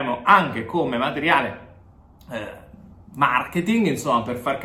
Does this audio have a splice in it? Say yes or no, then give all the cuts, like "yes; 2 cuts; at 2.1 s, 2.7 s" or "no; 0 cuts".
no; 0 cuts